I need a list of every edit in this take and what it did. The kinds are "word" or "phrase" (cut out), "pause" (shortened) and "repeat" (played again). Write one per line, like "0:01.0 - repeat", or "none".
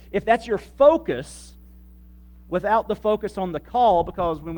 none